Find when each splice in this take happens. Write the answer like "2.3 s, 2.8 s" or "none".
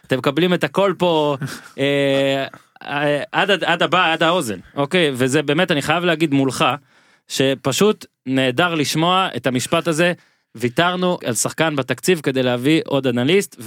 11.2 s